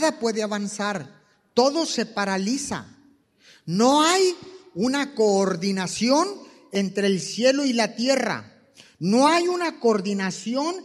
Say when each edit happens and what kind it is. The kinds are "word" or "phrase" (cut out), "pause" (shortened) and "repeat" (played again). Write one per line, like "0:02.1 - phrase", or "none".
none

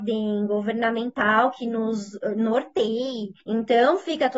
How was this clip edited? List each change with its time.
0:03.4 - pause

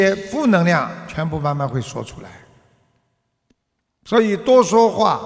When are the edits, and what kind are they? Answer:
none

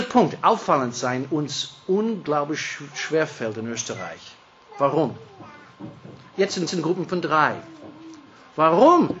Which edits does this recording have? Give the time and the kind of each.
0:06.7 - repeat

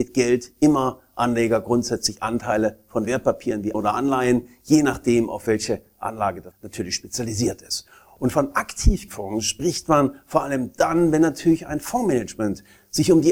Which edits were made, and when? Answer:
0:03.7 - word
0:06.5 - word
0:09.1 - word

